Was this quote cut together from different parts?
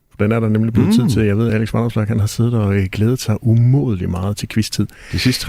no; 0 cuts

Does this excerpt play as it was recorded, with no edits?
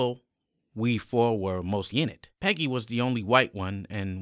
no; 2 cuts; at 1.9 s, 2.4 s

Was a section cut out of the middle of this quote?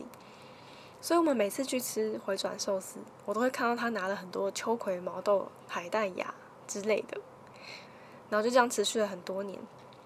no; 0 cuts

